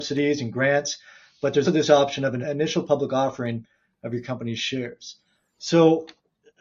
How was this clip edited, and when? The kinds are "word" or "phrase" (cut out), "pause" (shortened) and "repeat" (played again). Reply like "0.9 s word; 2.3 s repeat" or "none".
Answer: 1.6 s word; 2.4 s word